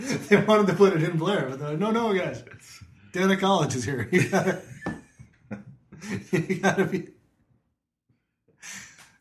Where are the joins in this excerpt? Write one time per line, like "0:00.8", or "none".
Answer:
none